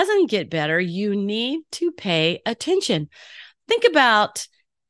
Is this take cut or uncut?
uncut